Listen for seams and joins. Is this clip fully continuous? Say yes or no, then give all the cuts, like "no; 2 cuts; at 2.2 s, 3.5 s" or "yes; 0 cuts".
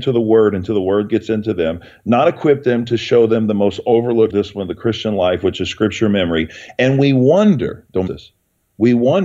no; 2 cuts; at 4.3 s, 8.1 s